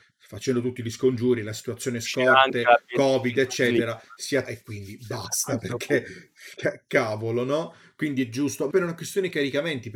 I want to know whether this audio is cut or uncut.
cut